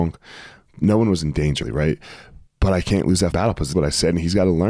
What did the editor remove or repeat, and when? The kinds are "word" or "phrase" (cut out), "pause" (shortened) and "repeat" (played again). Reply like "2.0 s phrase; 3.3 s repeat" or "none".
1.6 s word; 2.5 s pause; 3.3 s word; 3.7 s word